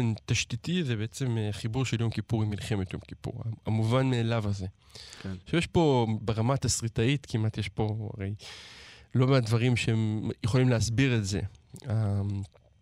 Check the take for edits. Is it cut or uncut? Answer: uncut